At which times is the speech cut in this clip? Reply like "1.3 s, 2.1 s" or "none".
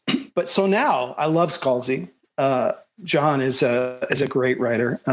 none